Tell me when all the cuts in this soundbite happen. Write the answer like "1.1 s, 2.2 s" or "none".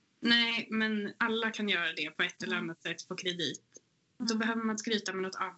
none